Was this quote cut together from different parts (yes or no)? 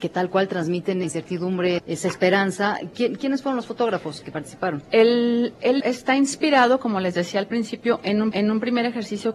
yes